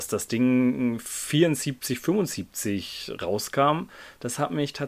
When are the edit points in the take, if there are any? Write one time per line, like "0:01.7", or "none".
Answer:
none